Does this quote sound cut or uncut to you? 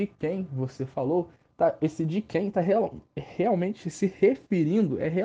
uncut